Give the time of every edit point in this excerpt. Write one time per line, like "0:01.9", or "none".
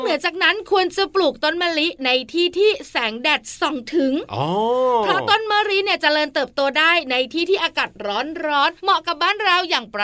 0:08.8

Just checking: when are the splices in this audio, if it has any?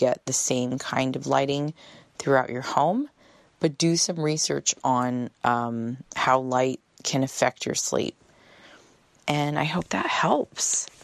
none

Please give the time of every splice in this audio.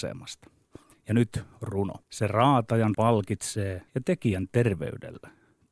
0:02.0
0:02.9
0:03.9

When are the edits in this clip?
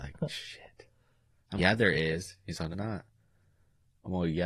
0:01.6
0:02.7

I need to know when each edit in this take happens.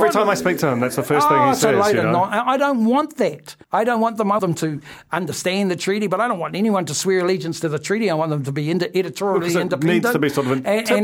0:03.6
0:04.4

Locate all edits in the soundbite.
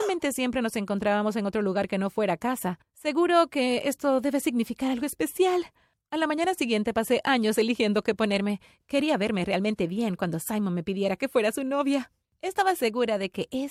none

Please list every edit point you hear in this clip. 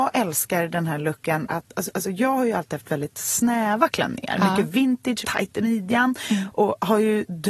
0:01.5
0:01.9
0:05.2

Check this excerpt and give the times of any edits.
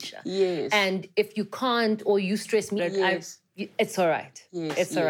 0:02.8

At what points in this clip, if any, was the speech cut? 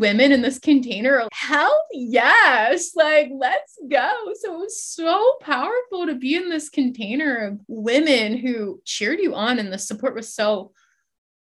0:01.3
0:07.6

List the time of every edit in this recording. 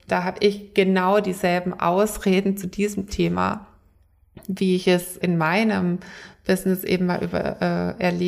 0:05.2

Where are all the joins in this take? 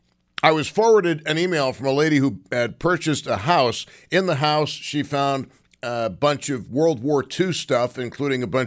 none

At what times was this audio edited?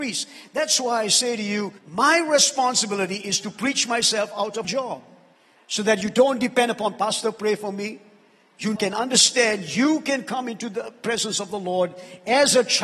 0:01.8
0:04.6
0:05.4
0:08.8

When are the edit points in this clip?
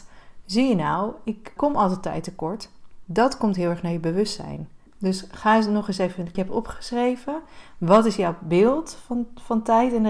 0:01.6
0:04.9
0:06.3

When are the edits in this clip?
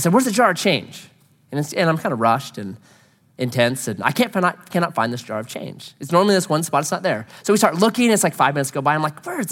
none

